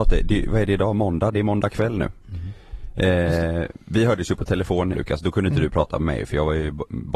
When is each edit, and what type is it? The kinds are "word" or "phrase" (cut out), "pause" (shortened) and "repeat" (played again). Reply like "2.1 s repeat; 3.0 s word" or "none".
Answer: 2.2 s pause; 4.9 s word